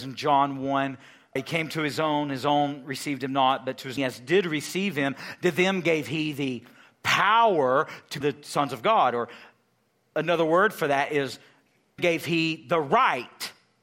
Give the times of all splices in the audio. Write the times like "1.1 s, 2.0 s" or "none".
1.4 s, 4.0 s, 8.2 s, 12.0 s

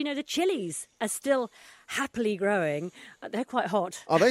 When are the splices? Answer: none

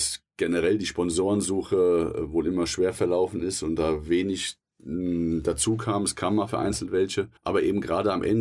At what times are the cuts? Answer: 7.4 s

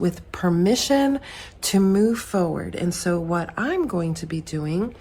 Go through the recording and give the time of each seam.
none

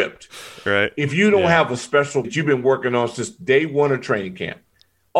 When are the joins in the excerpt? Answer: 2.2 s

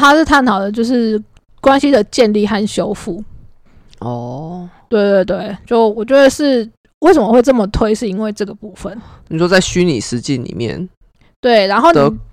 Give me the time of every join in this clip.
none

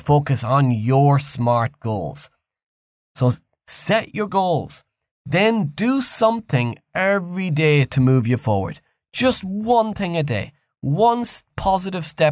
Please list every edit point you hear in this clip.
none

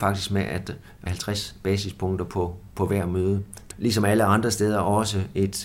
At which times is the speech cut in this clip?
1.1 s, 3.7 s

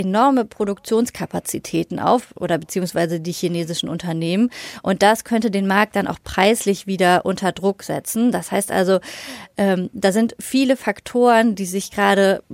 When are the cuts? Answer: none

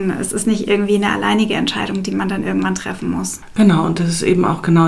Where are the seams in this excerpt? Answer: none

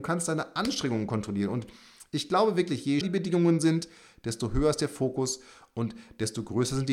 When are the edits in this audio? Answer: 3.0 s

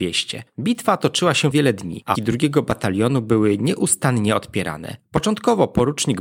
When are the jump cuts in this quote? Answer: 1.5 s, 2.1 s

